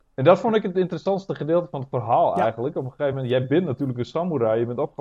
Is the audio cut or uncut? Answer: uncut